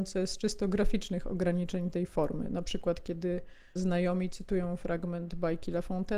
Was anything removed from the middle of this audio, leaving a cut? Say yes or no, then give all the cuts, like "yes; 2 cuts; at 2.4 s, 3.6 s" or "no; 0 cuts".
yes; 1 cut; at 3.8 s